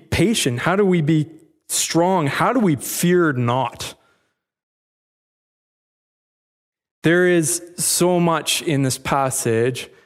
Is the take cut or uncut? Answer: uncut